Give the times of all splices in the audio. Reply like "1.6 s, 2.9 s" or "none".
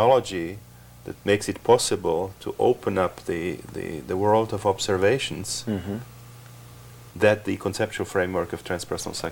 1.1 s, 7.1 s